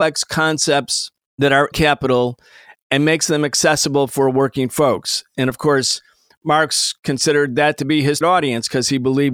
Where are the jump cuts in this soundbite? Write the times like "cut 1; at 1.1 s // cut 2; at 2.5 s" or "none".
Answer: cut 1; at 1.7 s // cut 2; at 8.2 s